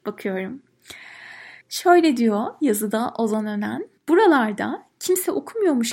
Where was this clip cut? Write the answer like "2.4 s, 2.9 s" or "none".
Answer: 1.6 s, 4.0 s